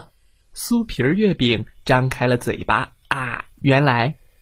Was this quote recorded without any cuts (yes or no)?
no